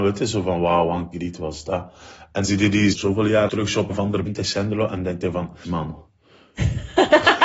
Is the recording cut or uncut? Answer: cut